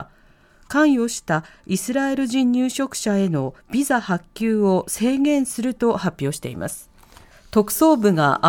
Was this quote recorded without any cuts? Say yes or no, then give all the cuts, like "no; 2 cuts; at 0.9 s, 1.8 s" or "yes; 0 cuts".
yes; 0 cuts